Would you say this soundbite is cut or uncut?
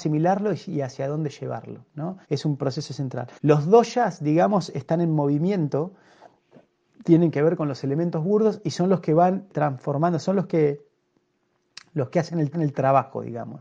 cut